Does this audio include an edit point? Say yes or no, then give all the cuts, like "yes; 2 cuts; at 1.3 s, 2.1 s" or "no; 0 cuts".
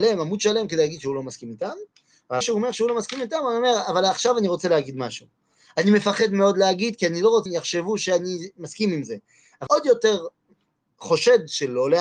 yes; 3 cuts; at 2.4 s, 7.5 s, 9.7 s